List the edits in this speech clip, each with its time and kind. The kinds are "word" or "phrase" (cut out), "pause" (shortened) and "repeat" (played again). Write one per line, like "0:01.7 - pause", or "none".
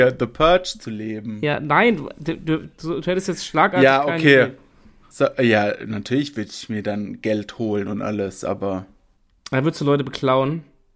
none